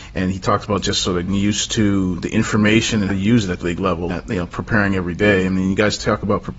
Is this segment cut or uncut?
cut